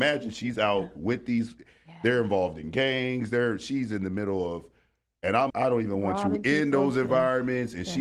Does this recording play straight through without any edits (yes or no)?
no